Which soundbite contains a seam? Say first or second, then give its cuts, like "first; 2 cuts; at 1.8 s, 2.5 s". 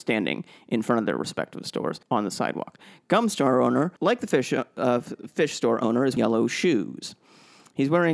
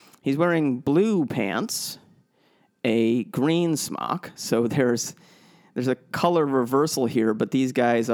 first; 3 cuts; at 2.0 s, 4.0 s, 6.2 s